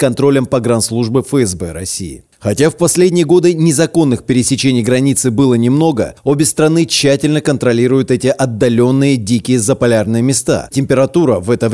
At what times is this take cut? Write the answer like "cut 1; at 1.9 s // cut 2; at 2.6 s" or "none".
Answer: cut 1; at 10.7 s